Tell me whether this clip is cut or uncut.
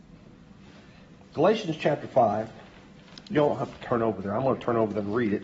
uncut